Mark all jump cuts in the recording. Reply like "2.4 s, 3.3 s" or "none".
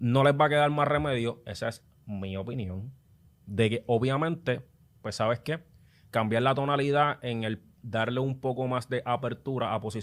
none